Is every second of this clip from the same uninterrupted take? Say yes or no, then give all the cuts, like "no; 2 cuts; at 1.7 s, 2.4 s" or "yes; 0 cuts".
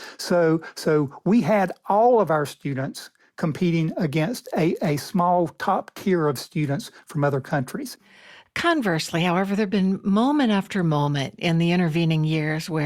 yes; 0 cuts